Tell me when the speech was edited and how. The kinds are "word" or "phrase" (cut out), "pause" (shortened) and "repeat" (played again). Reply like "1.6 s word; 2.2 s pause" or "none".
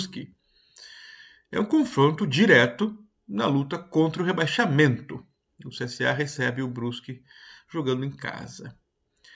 none